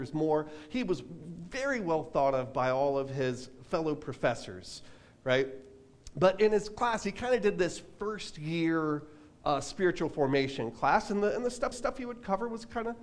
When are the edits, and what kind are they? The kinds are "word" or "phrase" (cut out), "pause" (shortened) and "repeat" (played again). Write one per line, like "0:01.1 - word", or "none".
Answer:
0:11.7 - repeat

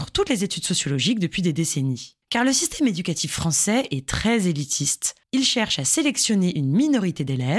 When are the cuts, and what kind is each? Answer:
0:02.2 - pause
0:05.2 - pause

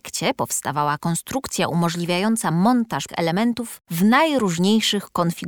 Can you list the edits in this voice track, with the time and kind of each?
0:03.1 - word
0:03.8 - pause

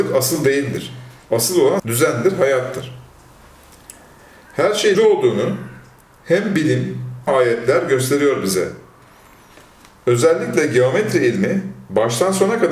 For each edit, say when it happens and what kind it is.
0:01.8 - word
0:04.9 - word
0:07.3 - word

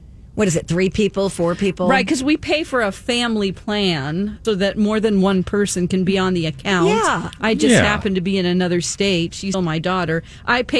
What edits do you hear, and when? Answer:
0:04.4 - word
0:09.5 - word

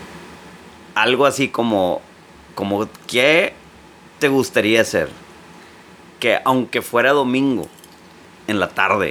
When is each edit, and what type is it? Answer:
none

